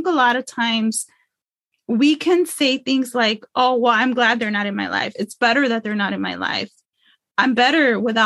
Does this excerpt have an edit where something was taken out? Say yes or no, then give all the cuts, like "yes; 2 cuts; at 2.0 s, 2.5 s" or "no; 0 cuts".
no; 0 cuts